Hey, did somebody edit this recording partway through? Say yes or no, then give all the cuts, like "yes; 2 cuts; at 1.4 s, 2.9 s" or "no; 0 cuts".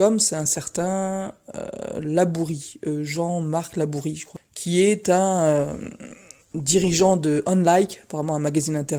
no; 0 cuts